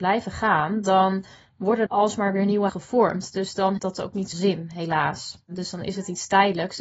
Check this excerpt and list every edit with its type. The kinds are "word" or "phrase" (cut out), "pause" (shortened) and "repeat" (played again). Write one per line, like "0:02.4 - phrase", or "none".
0:01.9 - word
0:02.7 - word
0:03.8 - word
0:04.3 - word